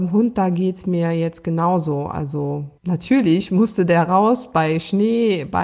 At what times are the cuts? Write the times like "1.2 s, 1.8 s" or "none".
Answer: 2.8 s